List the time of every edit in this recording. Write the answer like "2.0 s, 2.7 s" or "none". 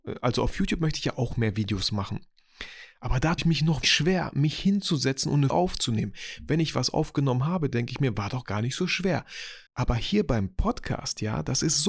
3.4 s, 3.8 s, 5.5 s, 9.7 s